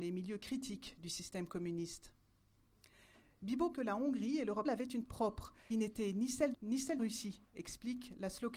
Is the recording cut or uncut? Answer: cut